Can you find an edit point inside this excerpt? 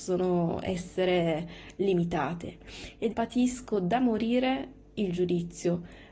yes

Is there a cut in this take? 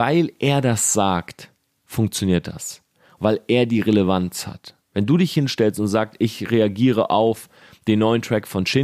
no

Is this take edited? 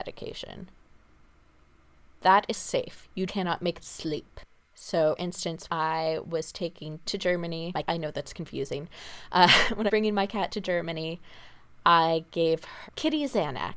yes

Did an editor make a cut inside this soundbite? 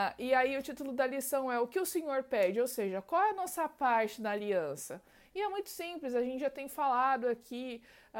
no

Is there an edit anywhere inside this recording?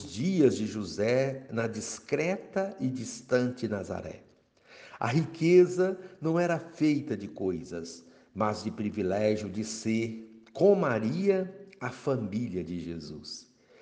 no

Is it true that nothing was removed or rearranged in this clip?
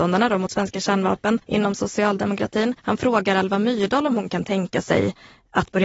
no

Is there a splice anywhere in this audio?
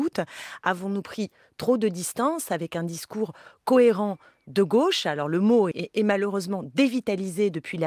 yes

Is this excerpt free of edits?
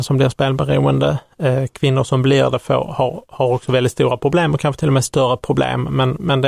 yes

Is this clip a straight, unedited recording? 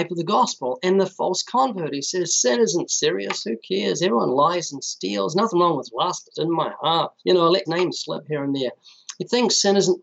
no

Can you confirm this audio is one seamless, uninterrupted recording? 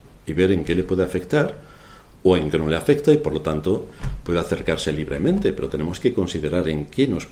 yes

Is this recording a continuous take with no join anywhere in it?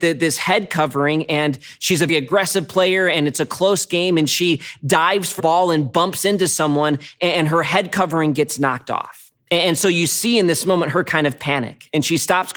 no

